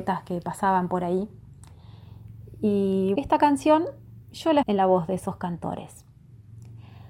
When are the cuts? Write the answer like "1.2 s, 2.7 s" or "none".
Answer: 3.2 s, 4.2 s, 4.6 s